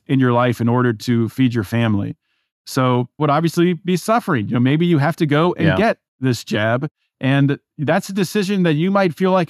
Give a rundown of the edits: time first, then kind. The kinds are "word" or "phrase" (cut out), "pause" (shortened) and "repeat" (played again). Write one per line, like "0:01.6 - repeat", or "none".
0:03.2 - word